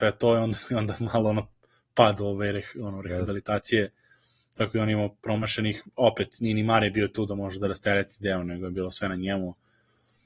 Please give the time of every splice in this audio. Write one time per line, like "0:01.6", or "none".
none